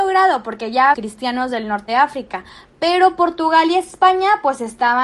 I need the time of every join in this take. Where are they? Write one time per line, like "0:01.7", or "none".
0:00.9
0:01.9